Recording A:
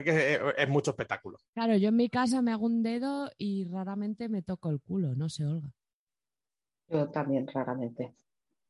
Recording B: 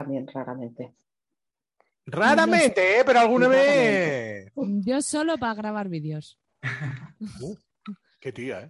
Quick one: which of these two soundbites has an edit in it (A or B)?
A